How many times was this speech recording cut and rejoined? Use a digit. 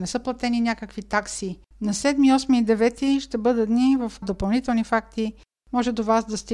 1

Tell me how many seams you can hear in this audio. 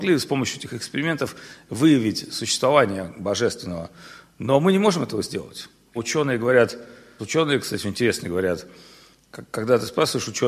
3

